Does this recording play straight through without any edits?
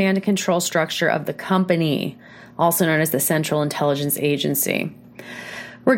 yes; 0 cuts

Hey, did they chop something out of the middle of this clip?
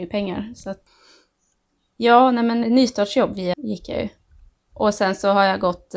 yes; 2 cuts; at 2.6 s, 3.5 s

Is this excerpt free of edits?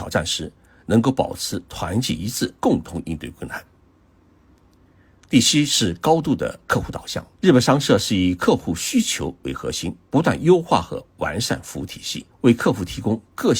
no; 4 cuts; at 2.6 s, 7.3 s, 10.1 s, 12.3 s

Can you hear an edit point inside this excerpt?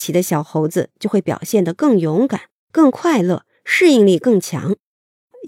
no; 0 cuts

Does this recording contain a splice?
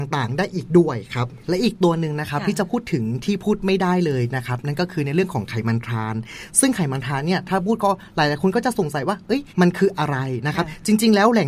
yes; 2 cuts; at 1.4 s, 9.5 s

